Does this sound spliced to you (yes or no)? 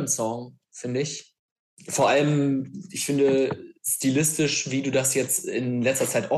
no